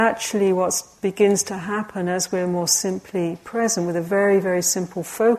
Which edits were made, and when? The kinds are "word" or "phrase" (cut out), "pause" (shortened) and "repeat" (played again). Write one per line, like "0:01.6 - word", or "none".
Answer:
none